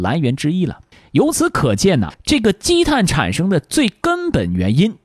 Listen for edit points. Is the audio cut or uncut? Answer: cut